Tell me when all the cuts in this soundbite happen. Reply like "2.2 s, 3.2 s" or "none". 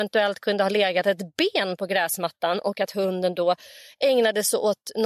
none